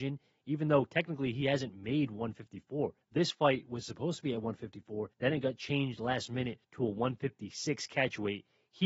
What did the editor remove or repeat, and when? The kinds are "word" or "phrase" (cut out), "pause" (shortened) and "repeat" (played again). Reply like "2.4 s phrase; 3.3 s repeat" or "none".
3.0 s pause; 5.1 s pause; 6.6 s pause